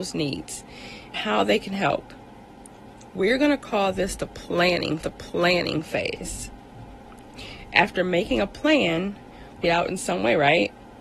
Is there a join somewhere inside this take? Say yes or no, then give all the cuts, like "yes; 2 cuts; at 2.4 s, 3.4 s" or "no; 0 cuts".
yes; 3 cuts; at 1.1 s, 5.0 s, 9.6 s